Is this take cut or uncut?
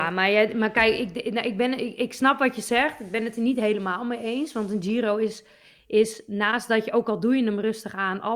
uncut